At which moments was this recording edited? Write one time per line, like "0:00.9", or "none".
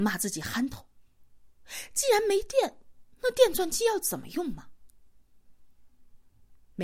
0:03.1